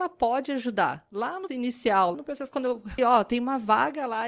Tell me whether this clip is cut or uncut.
cut